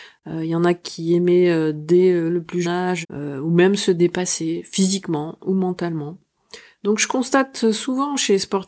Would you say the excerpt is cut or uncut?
cut